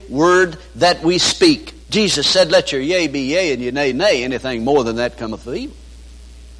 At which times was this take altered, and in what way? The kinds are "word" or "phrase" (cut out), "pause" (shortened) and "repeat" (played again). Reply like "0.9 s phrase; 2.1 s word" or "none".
1.8 s pause